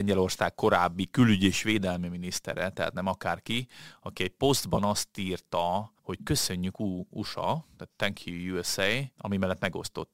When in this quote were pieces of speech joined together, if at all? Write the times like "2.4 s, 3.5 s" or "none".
6.0 s, 9.1 s